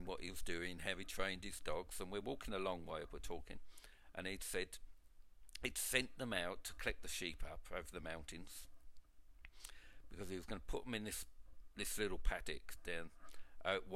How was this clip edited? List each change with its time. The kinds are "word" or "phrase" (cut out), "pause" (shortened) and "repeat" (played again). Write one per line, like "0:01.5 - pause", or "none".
none